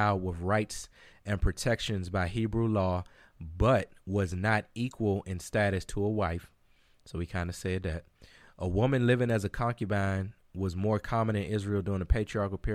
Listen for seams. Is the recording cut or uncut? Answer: uncut